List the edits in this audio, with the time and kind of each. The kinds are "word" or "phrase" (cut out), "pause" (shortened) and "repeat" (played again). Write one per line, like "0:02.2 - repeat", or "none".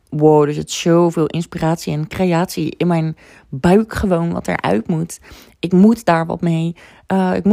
none